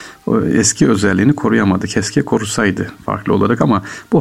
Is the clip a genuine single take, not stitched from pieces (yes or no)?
yes